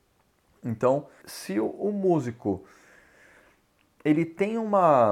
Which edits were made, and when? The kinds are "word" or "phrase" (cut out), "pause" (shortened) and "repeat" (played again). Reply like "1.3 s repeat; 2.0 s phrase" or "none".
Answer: 1.2 s word